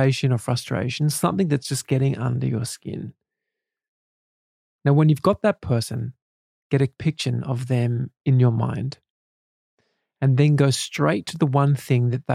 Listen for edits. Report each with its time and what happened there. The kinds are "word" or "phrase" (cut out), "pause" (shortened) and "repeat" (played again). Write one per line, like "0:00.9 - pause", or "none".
0:07.0 - word